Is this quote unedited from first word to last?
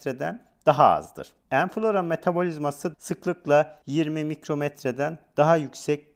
no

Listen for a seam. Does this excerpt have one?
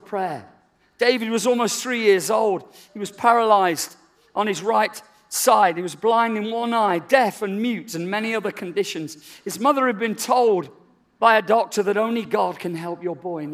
no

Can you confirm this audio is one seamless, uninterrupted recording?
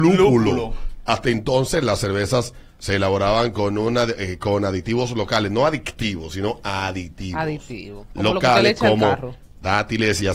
yes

